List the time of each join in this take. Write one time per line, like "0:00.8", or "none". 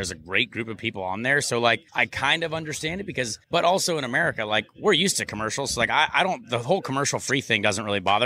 0:01.9
0:03.4